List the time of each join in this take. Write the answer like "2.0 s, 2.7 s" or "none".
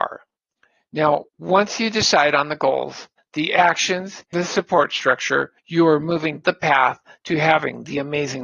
1.3 s, 3.2 s, 4.3 s, 5.6 s, 6.4 s